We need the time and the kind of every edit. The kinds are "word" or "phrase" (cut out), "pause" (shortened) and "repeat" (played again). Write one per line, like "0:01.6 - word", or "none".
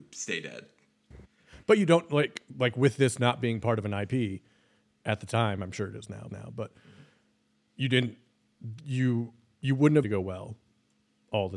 0:06.3 - repeat
0:10.0 - phrase